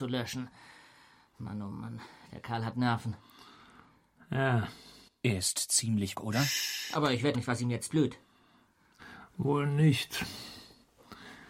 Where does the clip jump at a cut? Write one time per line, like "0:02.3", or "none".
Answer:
0:05.1
0:06.1
0:07.3